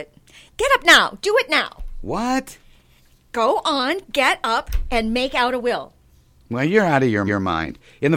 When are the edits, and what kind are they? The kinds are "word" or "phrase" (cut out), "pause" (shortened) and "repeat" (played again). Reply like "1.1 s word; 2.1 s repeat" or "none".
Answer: 7.3 s repeat